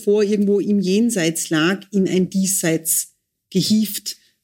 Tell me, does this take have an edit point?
no; 0 cuts

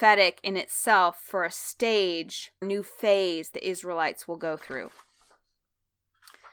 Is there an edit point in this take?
yes; 2 cuts; at 2.6 s, 3.5 s

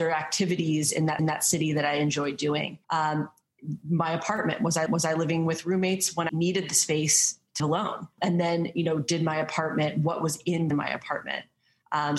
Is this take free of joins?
no; 7 cuts; at 1.2 s, 2.8 s, 4.9 s, 6.3 s, 7.6 s, 8.2 s, 10.7 s

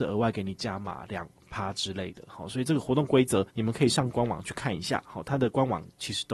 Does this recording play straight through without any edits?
no; 1 cut; at 3.5 s

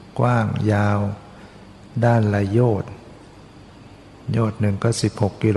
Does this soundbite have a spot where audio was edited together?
no; 0 cuts

